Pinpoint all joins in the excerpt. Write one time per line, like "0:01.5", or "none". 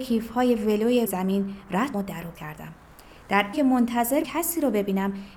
0:01.1
0:01.9
0:02.3
0:03.5
0:04.2